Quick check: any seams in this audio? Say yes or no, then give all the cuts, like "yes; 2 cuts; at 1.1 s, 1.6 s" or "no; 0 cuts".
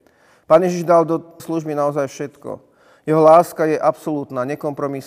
yes; 1 cut; at 1.4 s